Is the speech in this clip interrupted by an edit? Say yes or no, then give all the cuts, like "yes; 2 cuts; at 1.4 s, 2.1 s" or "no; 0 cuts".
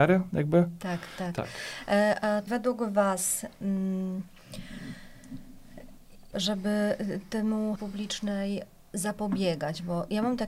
yes; 4 cuts; at 1.2 s, 2.5 s, 6.3 s, 7.8 s